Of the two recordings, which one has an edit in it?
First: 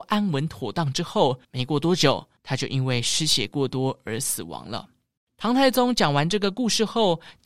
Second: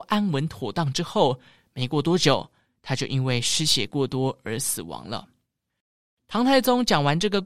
first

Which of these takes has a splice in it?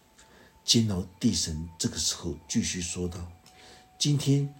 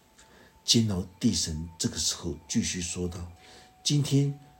second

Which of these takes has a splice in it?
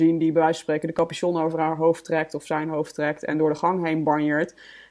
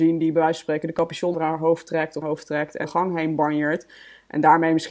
second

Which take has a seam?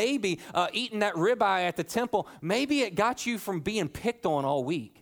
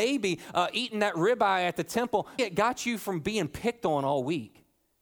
second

